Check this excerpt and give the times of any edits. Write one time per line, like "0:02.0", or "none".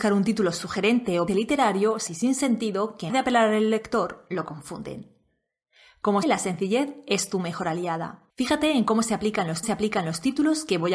0:01.3
0:02.1
0:03.1
0:06.2
0:08.3
0:09.6